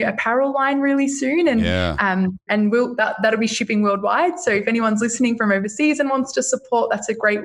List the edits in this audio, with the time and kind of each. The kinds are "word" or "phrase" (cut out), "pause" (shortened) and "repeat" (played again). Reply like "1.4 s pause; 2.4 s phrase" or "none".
2.5 s word